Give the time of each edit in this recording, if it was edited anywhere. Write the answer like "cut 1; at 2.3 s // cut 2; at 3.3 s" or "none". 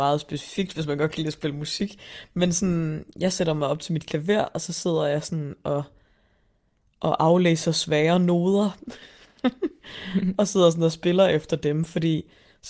none

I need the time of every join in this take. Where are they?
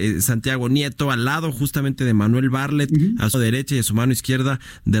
cut 1; at 3.3 s

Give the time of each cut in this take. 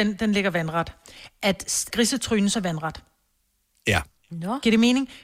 cut 1; at 1.9 s // cut 2; at 2.5 s

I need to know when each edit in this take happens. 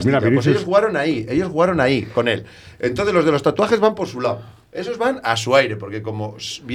none

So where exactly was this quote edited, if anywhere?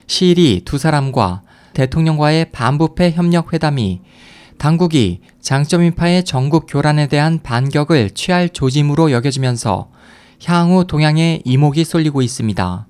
cut 1; at 1.7 s

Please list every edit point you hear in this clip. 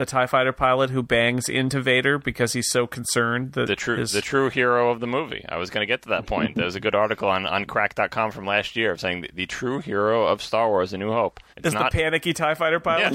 cut 1; at 11.5 s

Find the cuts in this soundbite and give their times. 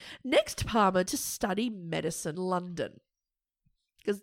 cut 1; at 1.1 s // cut 2; at 2.3 s

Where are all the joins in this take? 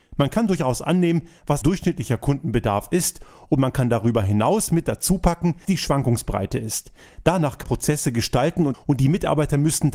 cut 1; at 1.6 s // cut 2; at 5.6 s // cut 3; at 7.6 s // cut 4; at 8.7 s

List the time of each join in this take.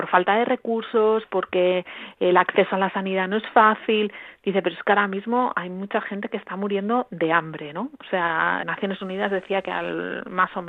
cut 1; at 8.6 s

